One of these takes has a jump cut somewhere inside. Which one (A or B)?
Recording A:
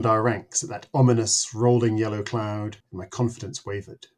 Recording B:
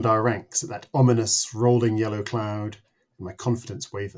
A